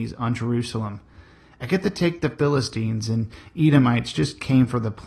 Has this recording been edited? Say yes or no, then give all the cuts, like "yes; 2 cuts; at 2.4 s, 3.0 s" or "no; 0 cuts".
no; 0 cuts